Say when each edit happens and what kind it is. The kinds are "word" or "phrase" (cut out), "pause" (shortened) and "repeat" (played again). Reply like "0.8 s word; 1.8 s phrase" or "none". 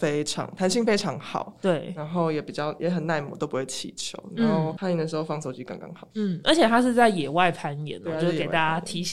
none